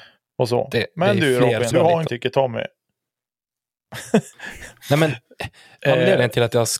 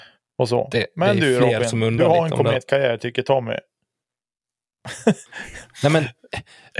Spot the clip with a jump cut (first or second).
first